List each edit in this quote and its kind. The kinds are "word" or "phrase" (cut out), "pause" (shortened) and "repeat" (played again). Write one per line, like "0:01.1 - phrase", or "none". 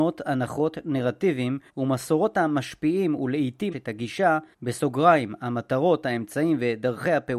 0:01.7 - pause
0:03.7 - phrase
0:04.5 - pause